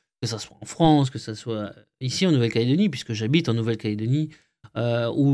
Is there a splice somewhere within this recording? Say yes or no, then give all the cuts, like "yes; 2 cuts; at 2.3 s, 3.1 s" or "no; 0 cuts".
no; 0 cuts